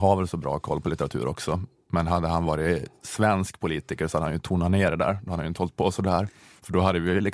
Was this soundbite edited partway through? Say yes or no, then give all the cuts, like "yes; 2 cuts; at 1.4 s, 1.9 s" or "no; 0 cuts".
no; 0 cuts